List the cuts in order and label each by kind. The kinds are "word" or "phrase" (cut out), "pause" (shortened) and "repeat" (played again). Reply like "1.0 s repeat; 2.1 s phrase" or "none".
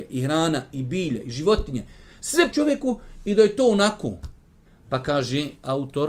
2.5 s word; 4.7 s pause

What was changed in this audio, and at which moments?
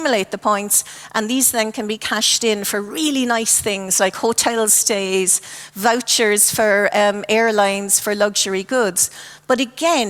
8.0 s word

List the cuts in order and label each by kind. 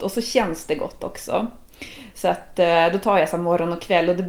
none

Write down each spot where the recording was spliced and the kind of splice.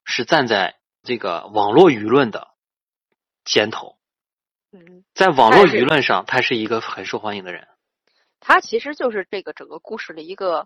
1.0 s word

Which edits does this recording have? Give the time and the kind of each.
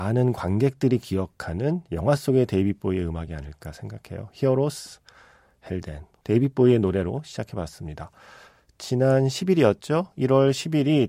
none

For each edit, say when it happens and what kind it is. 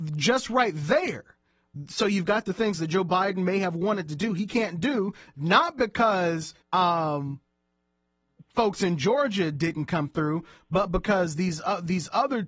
6.6 s pause

